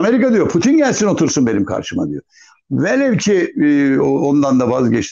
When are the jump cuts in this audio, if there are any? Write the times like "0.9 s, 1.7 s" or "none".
none